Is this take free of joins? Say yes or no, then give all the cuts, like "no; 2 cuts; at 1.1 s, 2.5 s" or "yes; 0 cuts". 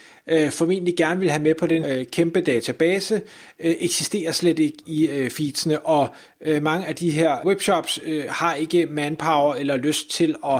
no; 2 cuts; at 1.8 s, 7.4 s